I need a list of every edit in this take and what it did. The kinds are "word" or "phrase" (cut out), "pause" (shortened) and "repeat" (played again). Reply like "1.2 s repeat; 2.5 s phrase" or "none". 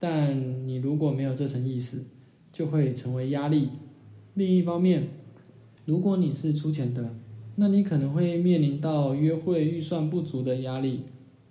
none